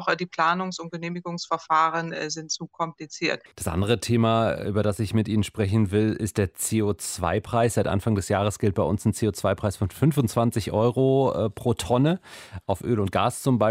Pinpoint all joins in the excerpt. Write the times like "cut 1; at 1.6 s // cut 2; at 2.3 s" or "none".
cut 1; at 3.5 s